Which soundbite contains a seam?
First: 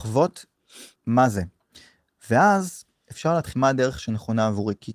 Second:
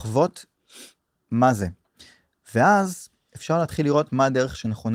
first; 2 cuts; at 1.0 s, 3.5 s

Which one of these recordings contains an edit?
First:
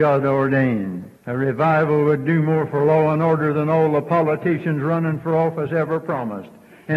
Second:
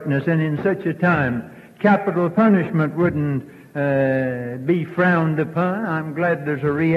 first; 1 cut; at 1.2 s

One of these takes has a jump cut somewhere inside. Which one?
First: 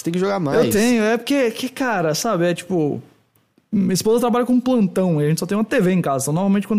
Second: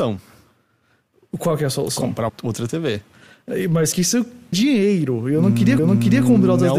second; 4 cuts; at 2.3 s, 3.9 s, 4.5 s, 5.8 s

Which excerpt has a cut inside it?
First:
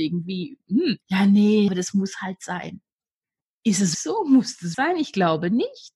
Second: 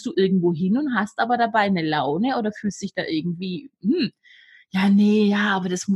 first; 4 cuts; at 1.0 s, 1.7 s, 3.9 s, 4.7 s

